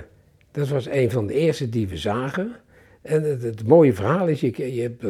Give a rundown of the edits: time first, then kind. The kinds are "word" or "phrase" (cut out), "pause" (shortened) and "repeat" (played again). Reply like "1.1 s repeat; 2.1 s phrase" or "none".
none